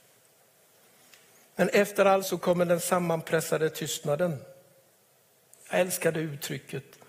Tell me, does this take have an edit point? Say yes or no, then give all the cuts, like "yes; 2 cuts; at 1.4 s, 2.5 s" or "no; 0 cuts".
yes; 1 cut; at 2.2 s